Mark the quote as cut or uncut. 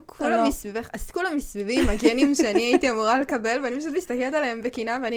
uncut